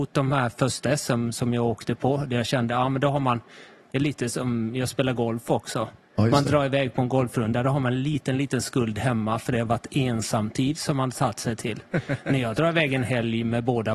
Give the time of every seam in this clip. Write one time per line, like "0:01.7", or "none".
none

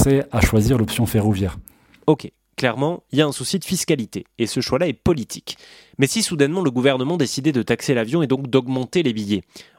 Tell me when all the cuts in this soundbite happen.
none

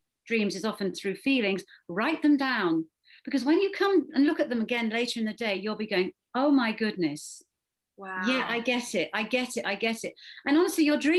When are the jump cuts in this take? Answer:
none

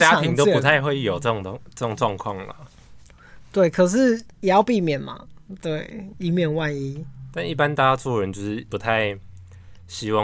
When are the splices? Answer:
0:04.3

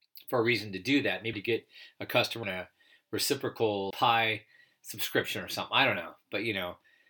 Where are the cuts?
0:01.3
0:02.4
0:03.9

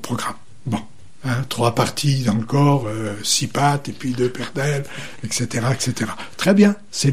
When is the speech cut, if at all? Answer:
none

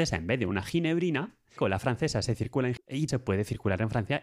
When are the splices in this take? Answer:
0:01.6
0:02.8
0:03.1

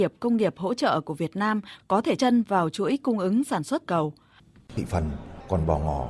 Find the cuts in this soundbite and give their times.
0:02.2
0:03.9

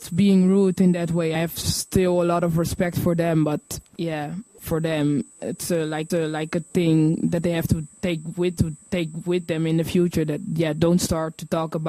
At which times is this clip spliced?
0:01.3
0:03.9
0:06.1
0:08.6

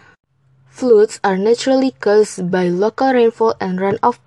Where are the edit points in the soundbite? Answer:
none

